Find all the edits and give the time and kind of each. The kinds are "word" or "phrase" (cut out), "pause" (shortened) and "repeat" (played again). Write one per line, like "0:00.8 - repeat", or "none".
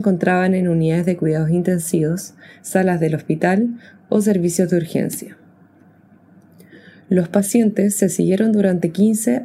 none